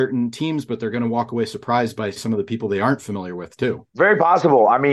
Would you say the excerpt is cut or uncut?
cut